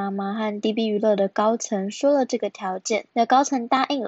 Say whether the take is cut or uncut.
cut